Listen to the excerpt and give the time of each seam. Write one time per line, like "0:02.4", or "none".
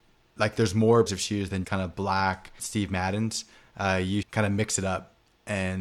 0:01.1
0:01.6
0:02.6
0:04.2